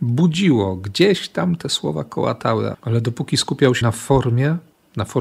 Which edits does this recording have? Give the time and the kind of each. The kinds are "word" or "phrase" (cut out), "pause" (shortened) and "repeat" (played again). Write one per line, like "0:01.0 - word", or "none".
0:02.7 - word
0:03.8 - word